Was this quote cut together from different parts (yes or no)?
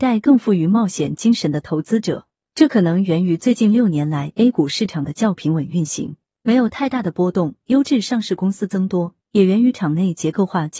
no